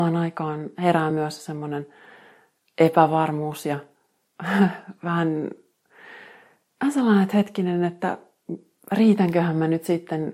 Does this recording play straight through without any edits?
yes; 0 cuts

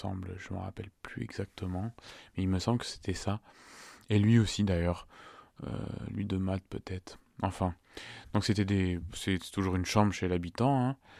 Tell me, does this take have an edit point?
no; 0 cuts

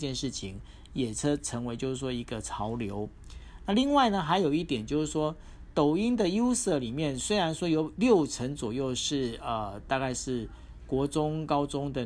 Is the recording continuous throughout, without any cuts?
yes; 0 cuts

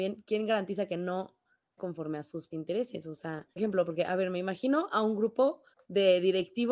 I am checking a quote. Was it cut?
yes; 4 cuts; at 1.8 s, 2.5 s, 3.6 s, 5.7 s

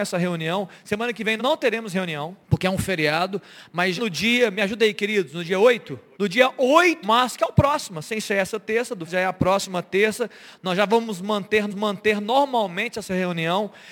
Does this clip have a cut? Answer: yes; 7 cuts; at 1.4 s, 2.4 s, 4.0 s, 6.1 s, 7.0 s, 9.1 s, 11.7 s

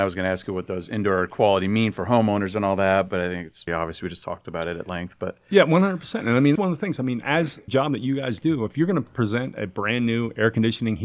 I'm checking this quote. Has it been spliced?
yes; 3 cuts; at 3.7 s, 6.6 s, 7.7 s

